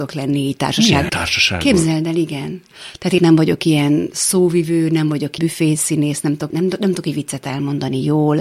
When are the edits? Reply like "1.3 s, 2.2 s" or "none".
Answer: 1.1 s, 3.2 s, 5.4 s, 6.5 s